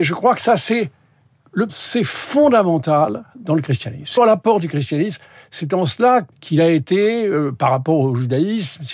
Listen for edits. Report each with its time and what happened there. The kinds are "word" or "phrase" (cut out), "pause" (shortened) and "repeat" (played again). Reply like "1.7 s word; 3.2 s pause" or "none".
1.7 s word; 4.2 s word; 6.3 s word